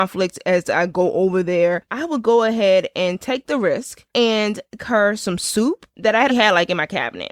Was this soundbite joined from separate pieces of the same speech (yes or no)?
yes